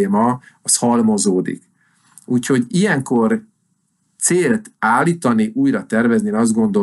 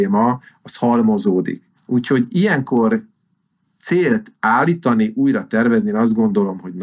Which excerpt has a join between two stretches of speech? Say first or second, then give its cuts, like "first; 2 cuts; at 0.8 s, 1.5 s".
second; 1 cut; at 1.8 s